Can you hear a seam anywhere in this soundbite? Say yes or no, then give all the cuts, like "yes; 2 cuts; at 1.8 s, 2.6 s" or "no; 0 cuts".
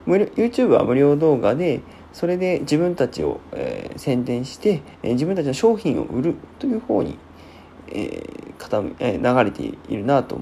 yes; 1 cut; at 4.9 s